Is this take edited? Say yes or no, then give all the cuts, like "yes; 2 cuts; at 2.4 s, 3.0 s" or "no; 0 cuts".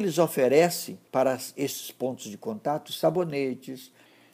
yes; 1 cut; at 1.1 s